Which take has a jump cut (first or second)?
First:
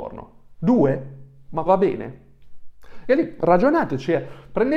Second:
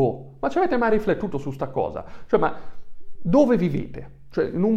first